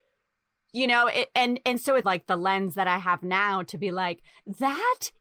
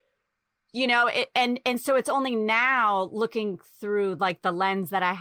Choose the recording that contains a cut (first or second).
first